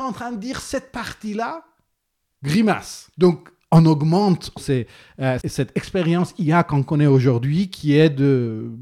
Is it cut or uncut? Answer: cut